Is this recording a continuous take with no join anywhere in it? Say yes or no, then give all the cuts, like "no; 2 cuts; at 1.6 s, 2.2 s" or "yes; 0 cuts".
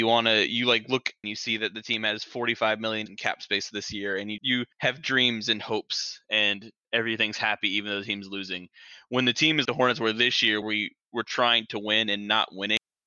no; 6 cuts; at 1.2 s, 3.1 s, 4.4 s, 4.7 s, 9.6 s, 10.6 s